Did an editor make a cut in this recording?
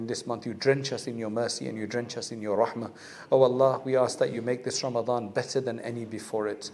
no; 0 cuts

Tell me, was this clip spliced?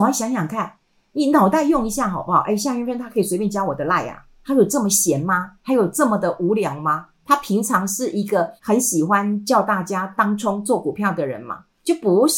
yes; 3 cuts; at 5.6 s, 7.1 s, 8.6 s

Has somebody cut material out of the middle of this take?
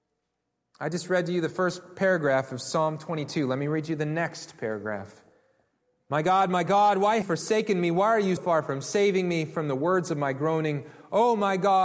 yes; 3 cuts; at 5.7 s, 7.2 s, 8.4 s

